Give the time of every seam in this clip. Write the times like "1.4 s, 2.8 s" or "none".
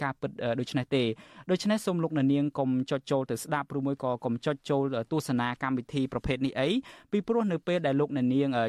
none